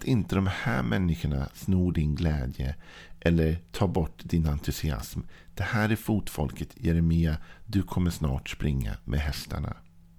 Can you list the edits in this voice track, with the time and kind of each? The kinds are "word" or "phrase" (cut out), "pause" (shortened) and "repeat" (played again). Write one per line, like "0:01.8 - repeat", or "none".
none